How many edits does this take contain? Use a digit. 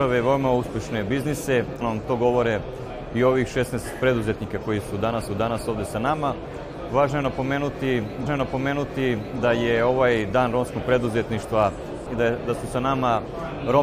4